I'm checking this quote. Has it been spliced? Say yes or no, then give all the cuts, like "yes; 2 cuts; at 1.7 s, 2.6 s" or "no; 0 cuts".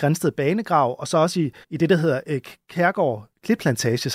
yes; 1 cut; at 1.6 s